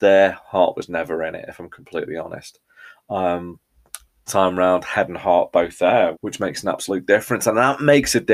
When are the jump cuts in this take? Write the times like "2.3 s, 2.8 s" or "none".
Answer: 4.3 s, 6.1 s